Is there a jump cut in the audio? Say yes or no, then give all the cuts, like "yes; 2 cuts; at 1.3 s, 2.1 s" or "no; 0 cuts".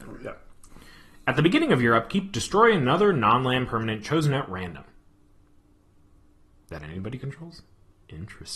no; 0 cuts